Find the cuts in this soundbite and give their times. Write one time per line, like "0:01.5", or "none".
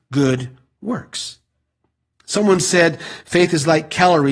none